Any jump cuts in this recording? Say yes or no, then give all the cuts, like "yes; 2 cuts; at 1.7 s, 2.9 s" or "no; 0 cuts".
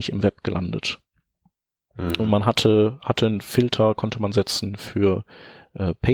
no; 0 cuts